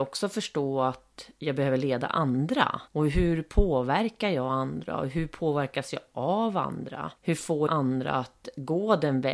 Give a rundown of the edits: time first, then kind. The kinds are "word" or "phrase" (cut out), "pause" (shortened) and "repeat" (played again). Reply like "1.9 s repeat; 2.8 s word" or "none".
2.9 s pause; 7.2 s pause; 7.7 s word